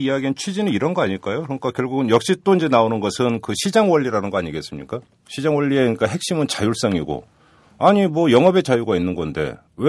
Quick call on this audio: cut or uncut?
uncut